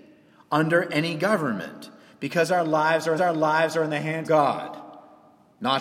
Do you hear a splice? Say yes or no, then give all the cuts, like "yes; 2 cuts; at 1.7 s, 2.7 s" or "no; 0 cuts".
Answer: yes; 2 cuts; at 3.2 s, 4.2 s